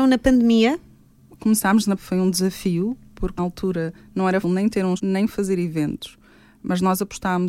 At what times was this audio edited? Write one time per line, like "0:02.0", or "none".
0:02.0
0:03.4
0:04.4
0:05.0